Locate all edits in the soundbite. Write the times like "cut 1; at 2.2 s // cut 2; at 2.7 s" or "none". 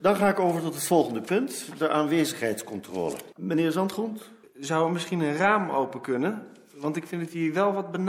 cut 1; at 3.3 s // cut 2; at 4.4 s